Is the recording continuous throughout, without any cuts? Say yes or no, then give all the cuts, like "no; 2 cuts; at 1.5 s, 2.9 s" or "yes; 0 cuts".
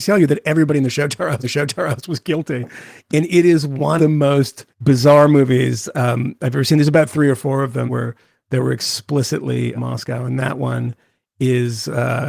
no; 5 cuts; at 1.4 s, 4.0 s, 4.7 s, 7.9 s, 9.7 s